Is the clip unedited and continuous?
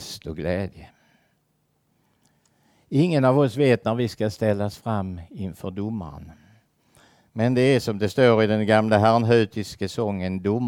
yes; 0 cuts

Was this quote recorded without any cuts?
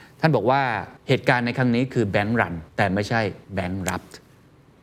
no; 3 cuts; at 1.0 s, 2.7 s, 3.4 s

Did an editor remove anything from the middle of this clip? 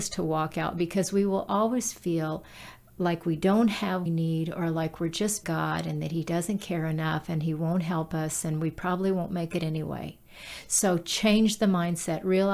yes; 2 cuts; at 4.1 s, 5.4 s

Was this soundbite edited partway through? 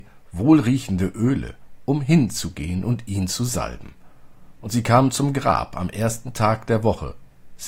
no; 0 cuts

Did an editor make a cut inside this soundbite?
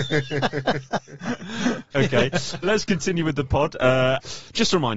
yes; 1 cut; at 2.6 s

